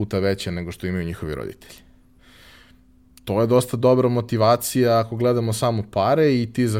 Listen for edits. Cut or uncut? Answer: uncut